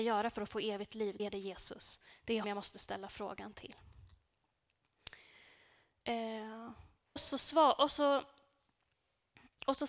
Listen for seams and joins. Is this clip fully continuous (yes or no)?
no